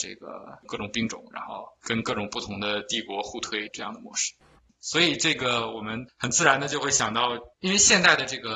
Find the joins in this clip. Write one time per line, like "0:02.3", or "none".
0:07.5